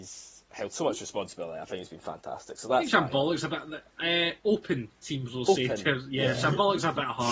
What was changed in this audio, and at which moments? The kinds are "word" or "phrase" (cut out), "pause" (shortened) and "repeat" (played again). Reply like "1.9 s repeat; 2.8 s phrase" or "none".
3.9 s pause